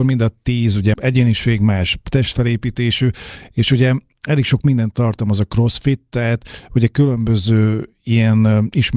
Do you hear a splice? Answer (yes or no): yes